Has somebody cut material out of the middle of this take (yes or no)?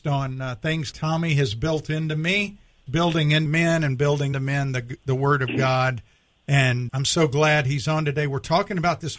yes